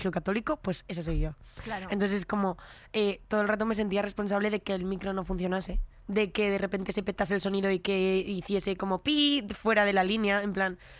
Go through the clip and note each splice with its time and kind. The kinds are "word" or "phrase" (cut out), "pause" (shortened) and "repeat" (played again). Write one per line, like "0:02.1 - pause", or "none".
none